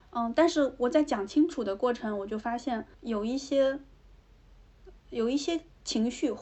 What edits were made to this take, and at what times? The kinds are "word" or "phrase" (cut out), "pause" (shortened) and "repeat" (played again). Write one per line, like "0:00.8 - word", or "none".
0:02.9 - pause
0:05.0 - pause